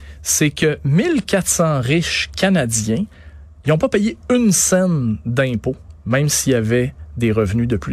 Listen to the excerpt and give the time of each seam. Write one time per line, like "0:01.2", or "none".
none

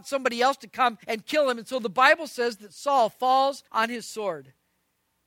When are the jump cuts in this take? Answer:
0:01.0
0:03.7

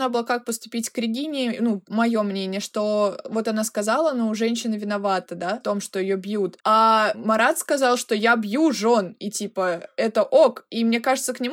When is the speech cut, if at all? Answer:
0:06.6

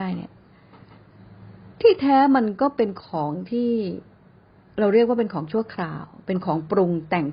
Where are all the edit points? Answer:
none

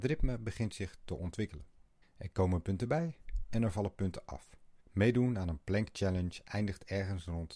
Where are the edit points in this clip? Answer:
0:02.0
0:04.8

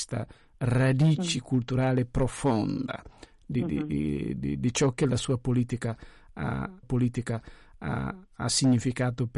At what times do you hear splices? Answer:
0:06.8

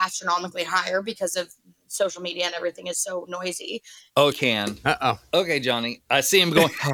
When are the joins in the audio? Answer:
0:04.3

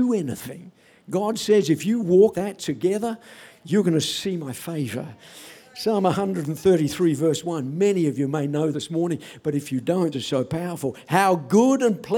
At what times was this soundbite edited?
0:02.3
0:08.7
0:10.1

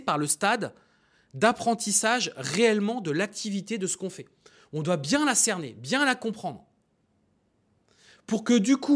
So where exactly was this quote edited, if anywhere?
none

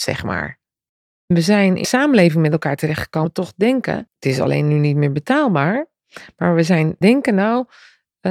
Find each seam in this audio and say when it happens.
0:01.8
0:03.3
0:04.1
0:07.0

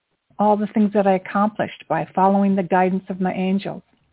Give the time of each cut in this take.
none

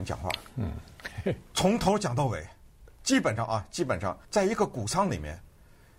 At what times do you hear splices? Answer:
0:04.2

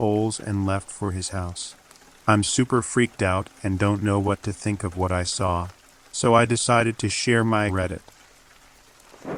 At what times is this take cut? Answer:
0:07.7

